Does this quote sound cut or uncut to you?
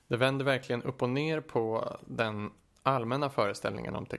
uncut